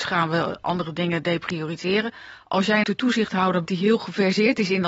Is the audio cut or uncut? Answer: cut